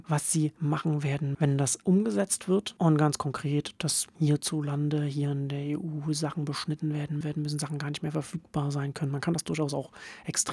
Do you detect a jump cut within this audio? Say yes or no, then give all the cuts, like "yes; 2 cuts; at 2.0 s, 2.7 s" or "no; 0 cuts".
yes; 2 cuts; at 1.3 s, 7.2 s